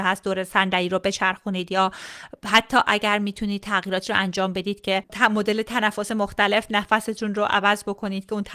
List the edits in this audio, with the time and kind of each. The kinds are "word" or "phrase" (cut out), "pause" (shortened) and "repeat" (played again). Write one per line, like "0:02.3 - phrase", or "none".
none